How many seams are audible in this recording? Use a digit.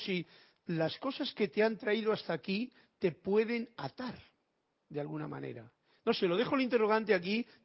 0